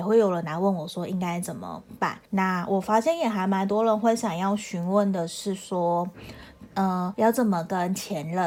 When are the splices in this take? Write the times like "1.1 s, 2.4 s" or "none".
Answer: 2.3 s, 7.1 s